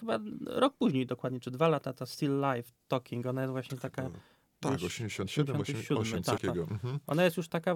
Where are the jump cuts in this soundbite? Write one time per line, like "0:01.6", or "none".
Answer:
0:06.4